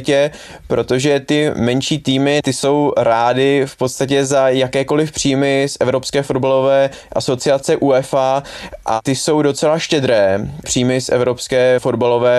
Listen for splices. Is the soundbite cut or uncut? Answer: uncut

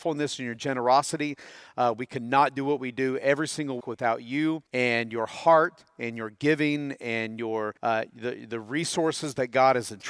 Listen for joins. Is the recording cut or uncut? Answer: cut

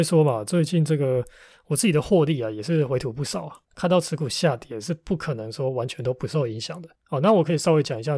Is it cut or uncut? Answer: cut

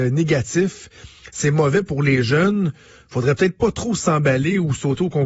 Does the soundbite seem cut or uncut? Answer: uncut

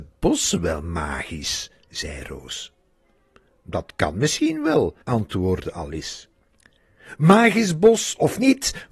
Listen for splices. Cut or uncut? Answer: cut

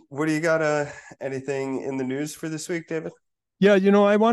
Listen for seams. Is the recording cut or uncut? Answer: uncut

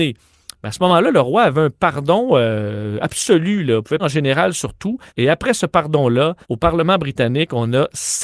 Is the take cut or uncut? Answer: cut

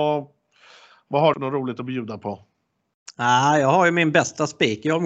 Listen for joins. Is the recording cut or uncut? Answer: cut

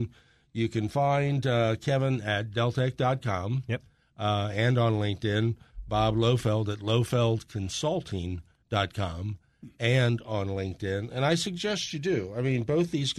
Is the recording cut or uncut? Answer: uncut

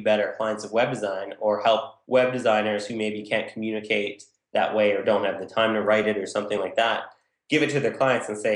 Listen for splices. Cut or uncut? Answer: uncut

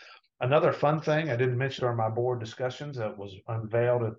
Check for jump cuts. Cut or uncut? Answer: cut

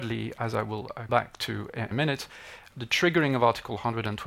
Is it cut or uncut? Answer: cut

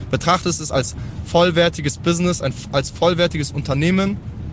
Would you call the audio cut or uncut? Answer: uncut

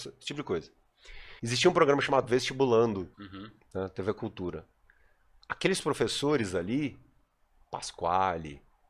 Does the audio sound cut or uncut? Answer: cut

